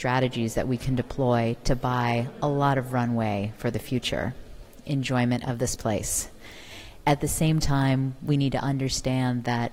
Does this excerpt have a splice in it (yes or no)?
no